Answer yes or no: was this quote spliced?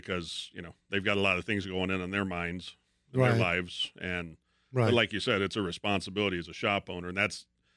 no